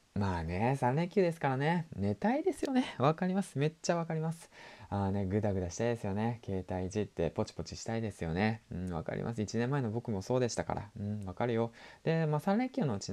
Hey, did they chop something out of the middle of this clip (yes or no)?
no